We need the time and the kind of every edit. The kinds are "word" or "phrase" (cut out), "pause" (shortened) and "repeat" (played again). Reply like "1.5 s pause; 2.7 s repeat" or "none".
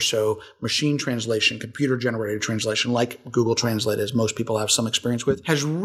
none